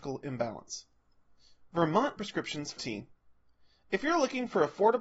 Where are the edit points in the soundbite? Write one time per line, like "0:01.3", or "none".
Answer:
0:02.2
0:02.8